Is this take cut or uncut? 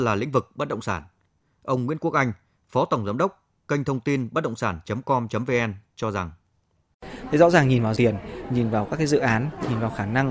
cut